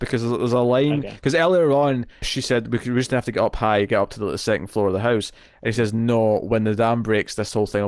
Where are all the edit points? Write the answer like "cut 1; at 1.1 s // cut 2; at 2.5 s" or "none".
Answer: cut 1; at 2.2 s